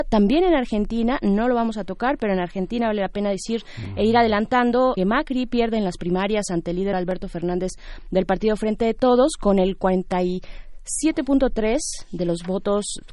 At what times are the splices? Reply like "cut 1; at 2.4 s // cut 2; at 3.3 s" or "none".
cut 1; at 5.0 s // cut 2; at 6.9 s